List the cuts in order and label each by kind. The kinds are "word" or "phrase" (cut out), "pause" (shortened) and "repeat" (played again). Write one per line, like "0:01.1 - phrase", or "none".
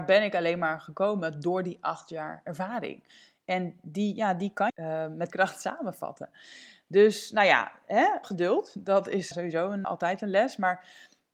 0:04.7 - phrase
0:05.3 - word
0:08.2 - word
0:09.3 - word
0:09.8 - word